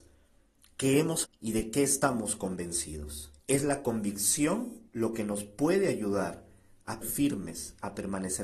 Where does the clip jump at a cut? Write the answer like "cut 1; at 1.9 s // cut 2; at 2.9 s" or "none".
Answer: cut 1; at 1.2 s // cut 2; at 3.4 s // cut 3; at 4.9 s // cut 4; at 7.0 s